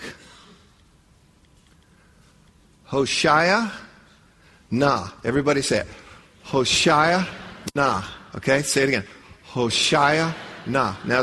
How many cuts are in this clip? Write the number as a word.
zero